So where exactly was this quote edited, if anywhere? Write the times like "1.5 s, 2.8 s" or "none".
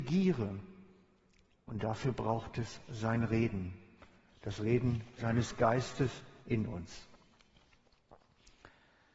none